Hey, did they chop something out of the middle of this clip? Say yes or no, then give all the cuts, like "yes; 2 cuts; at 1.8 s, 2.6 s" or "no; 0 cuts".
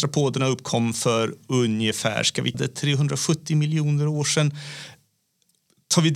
yes; 1 cut; at 2.5 s